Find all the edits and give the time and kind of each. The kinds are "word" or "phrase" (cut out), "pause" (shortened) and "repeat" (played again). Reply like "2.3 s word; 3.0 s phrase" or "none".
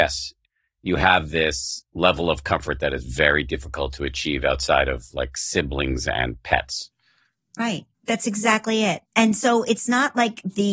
7.9 s pause; 9.1 s pause

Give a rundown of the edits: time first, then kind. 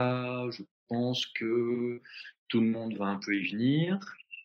none

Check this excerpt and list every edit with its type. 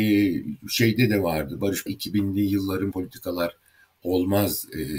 1.9 s phrase; 2.9 s word

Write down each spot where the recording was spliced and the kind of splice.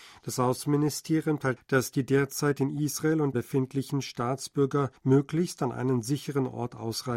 1.6 s word; 3.3 s phrase; 5.0 s pause

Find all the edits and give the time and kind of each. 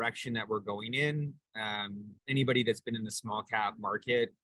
2.2 s pause

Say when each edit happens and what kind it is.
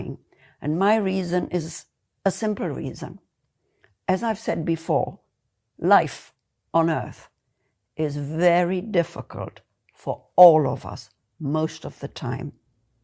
none

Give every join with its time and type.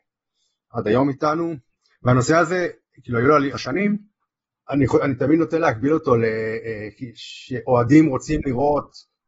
3.5 s phrase

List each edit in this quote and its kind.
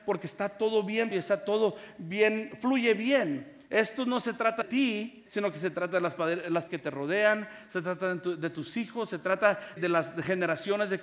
1.1 s word; 4.6 s word; 5.3 s word; 6.7 s word; 9.8 s word

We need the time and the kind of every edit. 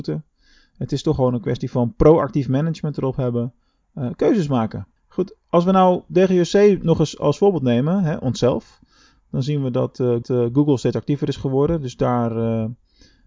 5.0 s pause; 10.2 s repeat

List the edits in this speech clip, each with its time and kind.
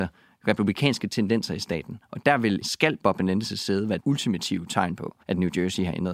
2.6 s word; 3.0 s word; 4.0 s word; 5.2 s pause

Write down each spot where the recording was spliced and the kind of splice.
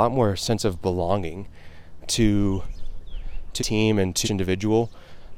2.0 s word; 3.6 s word; 4.2 s word

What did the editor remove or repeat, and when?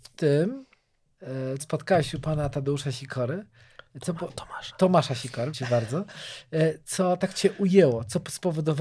1.6 s word; 5.5 s word

